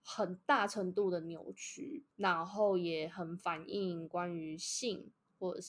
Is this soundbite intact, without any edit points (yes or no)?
no